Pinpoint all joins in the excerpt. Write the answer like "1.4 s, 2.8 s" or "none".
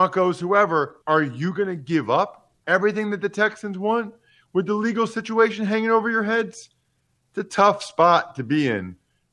1.0 s, 2.6 s